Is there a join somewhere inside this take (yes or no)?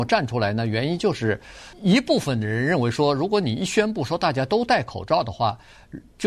yes